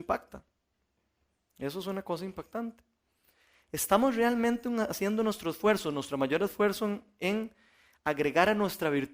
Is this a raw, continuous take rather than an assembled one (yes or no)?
yes